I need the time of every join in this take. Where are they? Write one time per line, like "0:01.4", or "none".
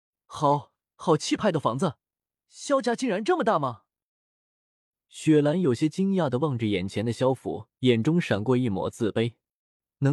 0:07.7